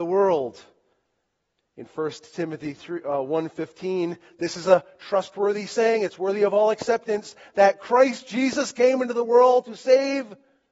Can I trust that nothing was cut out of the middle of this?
yes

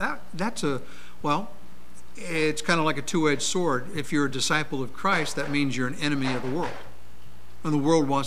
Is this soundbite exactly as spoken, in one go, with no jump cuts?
yes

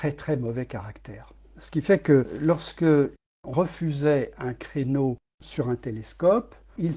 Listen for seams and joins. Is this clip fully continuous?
no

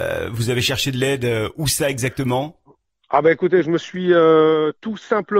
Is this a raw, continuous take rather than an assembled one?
yes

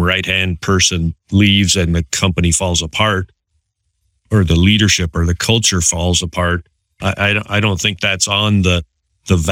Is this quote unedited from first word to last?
yes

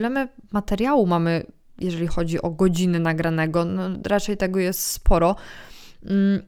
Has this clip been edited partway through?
no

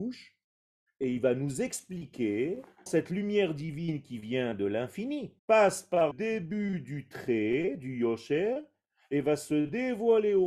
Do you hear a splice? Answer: yes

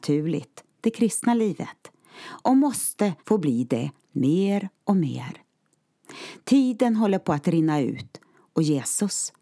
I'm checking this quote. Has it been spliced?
yes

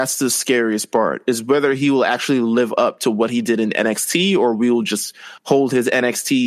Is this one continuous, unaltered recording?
no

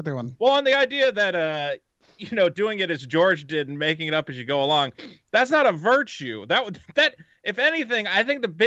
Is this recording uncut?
yes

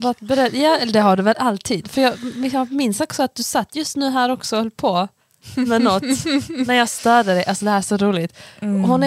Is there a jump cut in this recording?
no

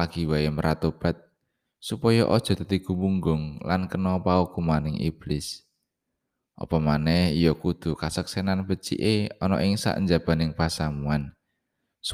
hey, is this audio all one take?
yes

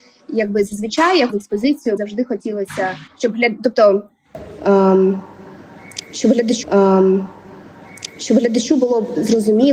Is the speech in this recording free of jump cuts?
no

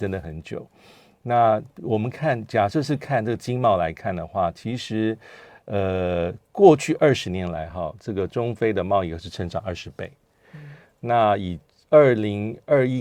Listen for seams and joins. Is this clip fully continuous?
yes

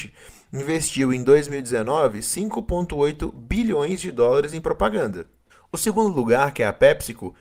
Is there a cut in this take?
yes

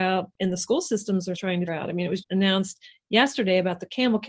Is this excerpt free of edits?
no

